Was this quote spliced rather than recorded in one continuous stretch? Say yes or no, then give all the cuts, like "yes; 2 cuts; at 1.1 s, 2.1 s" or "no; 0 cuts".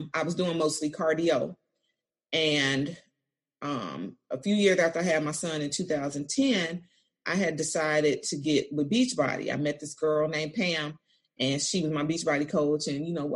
no; 0 cuts